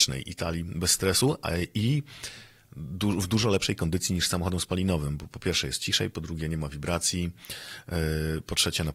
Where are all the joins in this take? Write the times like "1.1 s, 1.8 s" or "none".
none